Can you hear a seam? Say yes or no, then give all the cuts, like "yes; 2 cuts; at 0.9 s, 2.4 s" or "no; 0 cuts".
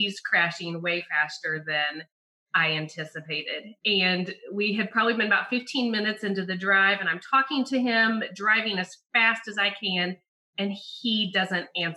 no; 0 cuts